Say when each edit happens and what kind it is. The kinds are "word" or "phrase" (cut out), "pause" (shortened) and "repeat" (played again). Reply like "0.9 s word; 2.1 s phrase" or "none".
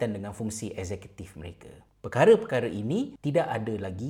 none